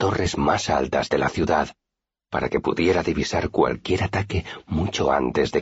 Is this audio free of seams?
yes; 0 cuts

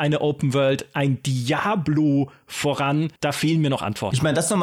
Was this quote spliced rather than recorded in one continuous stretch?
yes; 1 cut; at 3.2 s

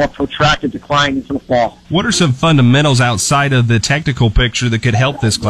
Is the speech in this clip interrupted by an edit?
yes; 1 cut; at 1.8 s

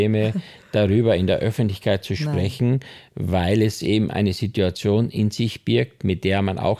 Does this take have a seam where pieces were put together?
no; 0 cuts

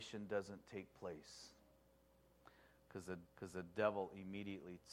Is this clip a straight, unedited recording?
no; 1 cut; at 3.2 s

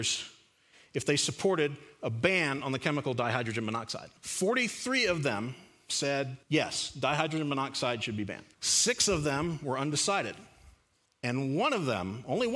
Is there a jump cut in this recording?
yes; 4 cuts; at 4.2 s, 6.4 s, 8.5 s, 11.1 s

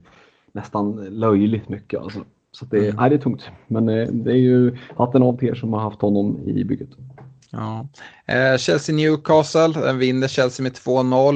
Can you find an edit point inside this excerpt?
no; 0 cuts

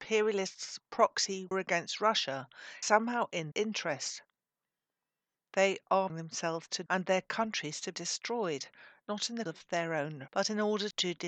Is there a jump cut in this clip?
yes; 8 cuts; at 1.5 s, 2.8 s, 3.5 s, 6.1 s, 6.9 s, 7.9 s, 9.5 s, 10.3 s

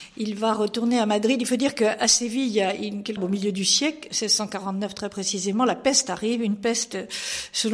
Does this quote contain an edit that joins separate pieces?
yes; 1 cut; at 3.2 s

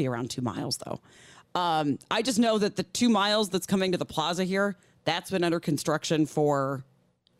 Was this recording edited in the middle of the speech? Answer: no; 0 cuts

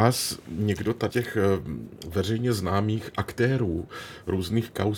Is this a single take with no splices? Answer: no; 2 cuts; at 1.1 s, 2.0 s

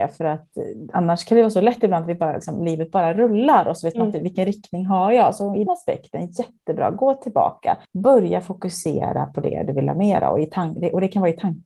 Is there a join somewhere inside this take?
yes; 2 cuts; at 5.7 s, 7.8 s

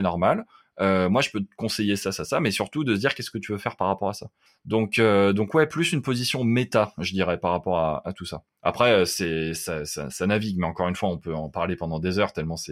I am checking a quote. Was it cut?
yes; 1 cut; at 4.5 s

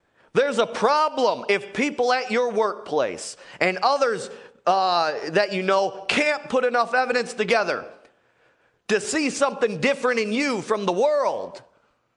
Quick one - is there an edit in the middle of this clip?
no; 0 cuts

